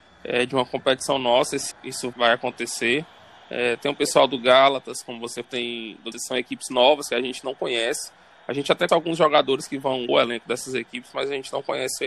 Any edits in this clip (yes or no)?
yes